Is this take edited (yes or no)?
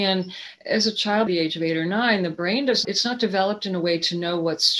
yes